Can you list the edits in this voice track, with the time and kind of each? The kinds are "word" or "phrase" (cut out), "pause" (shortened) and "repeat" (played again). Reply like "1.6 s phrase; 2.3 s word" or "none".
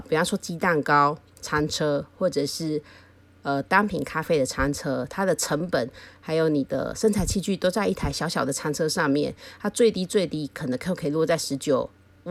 none